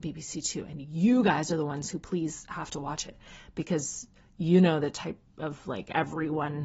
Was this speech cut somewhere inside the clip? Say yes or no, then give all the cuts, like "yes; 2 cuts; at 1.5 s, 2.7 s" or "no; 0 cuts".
no; 0 cuts